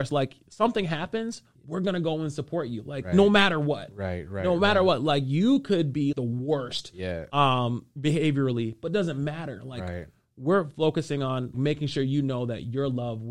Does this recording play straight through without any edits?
no; 2 cuts; at 6.1 s, 11.5 s

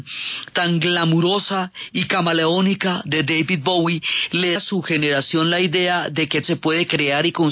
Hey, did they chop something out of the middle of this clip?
yes; 2 cuts; at 4.6 s, 6.4 s

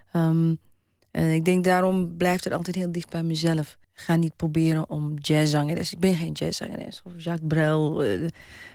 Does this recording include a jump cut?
yes; 2 cuts; at 3.8 s, 4.9 s

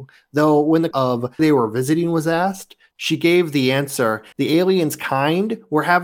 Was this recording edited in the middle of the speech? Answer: yes; 3 cuts; at 0.9 s, 1.4 s, 4.3 s

